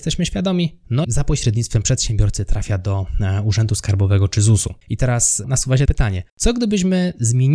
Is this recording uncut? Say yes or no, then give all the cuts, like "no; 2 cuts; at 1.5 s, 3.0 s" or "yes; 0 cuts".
no; 5 cuts; at 1.0 s, 4.8 s, 5.4 s, 5.9 s, 6.3 s